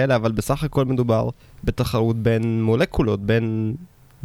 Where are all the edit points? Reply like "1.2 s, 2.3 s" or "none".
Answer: 1.4 s